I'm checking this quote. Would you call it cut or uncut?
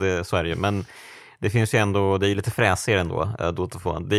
uncut